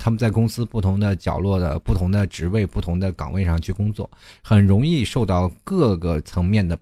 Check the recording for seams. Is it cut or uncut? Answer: uncut